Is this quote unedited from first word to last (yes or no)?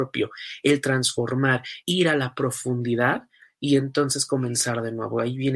no